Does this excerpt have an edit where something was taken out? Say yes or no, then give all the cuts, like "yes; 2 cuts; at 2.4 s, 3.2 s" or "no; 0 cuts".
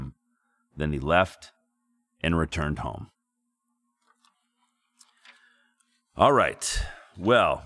no; 0 cuts